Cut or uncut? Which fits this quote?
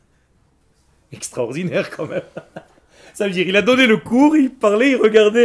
uncut